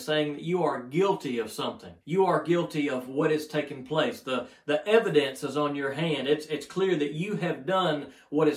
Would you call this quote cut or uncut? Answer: cut